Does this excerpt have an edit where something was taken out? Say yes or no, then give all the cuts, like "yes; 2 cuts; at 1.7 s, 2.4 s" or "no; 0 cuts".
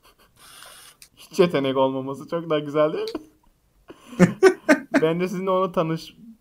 no; 0 cuts